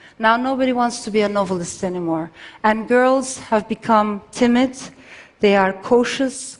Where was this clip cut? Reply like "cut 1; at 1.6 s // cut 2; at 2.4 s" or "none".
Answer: none

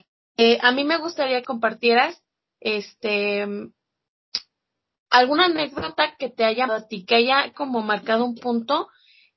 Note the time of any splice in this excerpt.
cut 1; at 1.4 s // cut 2; at 6.7 s // cut 3; at 7.5 s

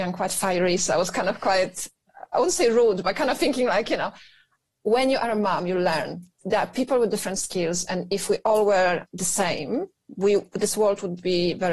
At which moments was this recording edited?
none

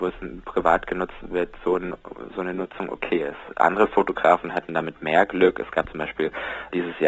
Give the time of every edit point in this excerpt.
none

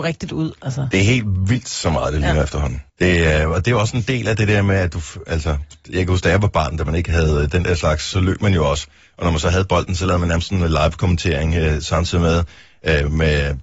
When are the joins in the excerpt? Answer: cut 1; at 2.9 s

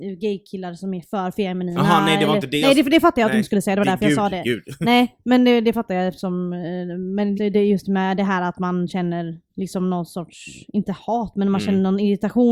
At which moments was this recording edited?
cut 1; at 7.4 s // cut 2; at 9.5 s

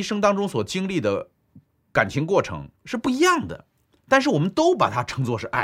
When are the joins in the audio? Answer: none

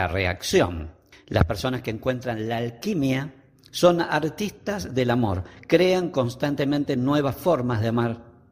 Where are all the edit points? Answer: cut 1; at 1.1 s

